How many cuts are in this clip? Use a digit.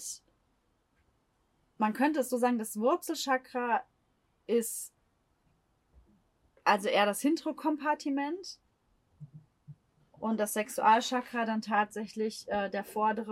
0